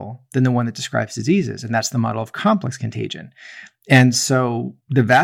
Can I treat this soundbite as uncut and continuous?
yes; 0 cuts

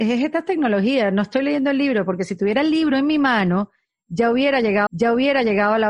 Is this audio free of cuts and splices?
no; 1 cut; at 4.9 s

